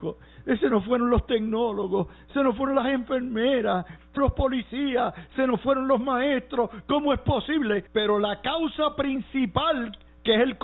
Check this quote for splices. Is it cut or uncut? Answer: cut